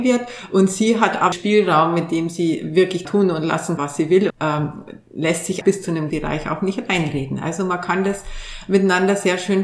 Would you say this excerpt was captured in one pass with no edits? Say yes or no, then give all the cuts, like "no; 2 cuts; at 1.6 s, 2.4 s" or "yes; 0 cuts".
no; 6 cuts; at 1.3 s, 3.0 s, 3.8 s, 4.3 s, 5.6 s, 6.1 s